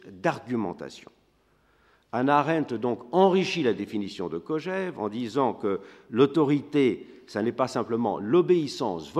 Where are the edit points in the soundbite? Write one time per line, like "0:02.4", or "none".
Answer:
none